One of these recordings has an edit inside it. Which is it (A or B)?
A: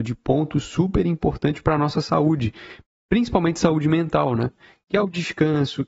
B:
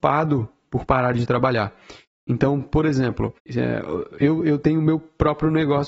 B